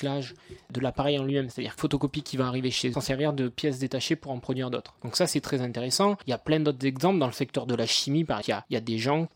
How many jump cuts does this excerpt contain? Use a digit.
3